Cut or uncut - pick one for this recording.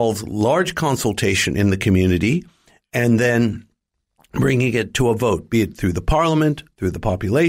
uncut